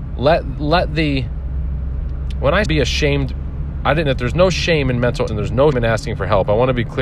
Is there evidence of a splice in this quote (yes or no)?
yes